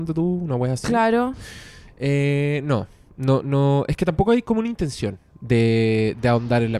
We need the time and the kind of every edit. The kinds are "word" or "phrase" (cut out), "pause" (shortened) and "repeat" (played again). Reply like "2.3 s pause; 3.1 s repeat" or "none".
none